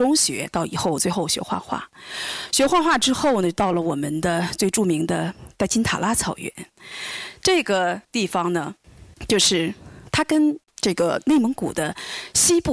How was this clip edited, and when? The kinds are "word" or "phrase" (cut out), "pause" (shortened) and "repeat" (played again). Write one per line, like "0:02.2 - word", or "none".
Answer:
0:08.0 - pause
0:09.1 - pause
0:10.6 - pause